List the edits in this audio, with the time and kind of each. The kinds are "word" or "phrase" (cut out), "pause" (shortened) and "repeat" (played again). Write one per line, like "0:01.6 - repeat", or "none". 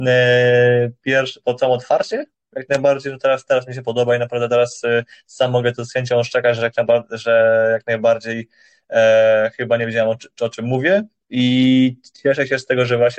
none